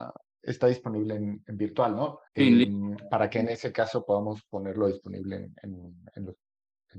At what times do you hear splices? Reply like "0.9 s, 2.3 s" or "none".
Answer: 2.3 s